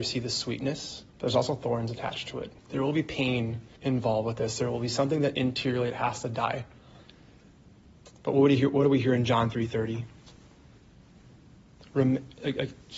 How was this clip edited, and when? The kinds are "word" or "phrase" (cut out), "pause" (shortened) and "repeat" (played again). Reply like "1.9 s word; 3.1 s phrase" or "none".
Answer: 1.1 s pause; 2.6 s pause; 3.8 s pause